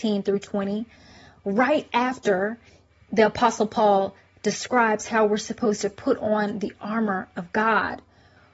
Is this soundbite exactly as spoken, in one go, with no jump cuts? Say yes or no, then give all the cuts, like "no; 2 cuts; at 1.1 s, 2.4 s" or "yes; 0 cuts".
yes; 0 cuts